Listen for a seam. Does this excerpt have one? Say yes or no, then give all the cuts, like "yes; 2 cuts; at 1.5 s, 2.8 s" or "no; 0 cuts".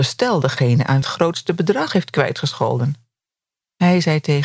yes; 2 cuts; at 1.0 s, 3.3 s